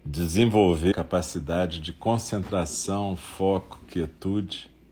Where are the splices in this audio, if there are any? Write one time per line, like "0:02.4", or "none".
0:00.9